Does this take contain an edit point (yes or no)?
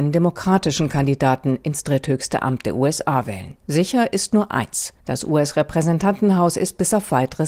yes